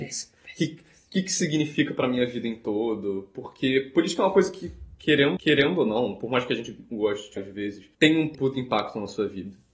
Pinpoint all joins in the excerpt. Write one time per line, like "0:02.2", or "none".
0:05.4
0:07.4
0:07.9
0:08.3